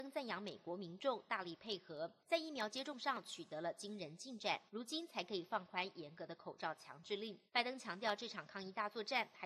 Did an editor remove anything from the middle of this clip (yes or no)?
yes